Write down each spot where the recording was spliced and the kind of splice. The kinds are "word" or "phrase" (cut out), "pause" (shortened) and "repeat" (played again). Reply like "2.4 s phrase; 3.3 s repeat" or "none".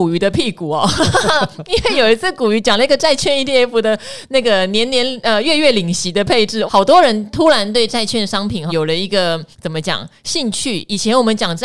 6.7 s word; 8.7 s word; 9.5 s pause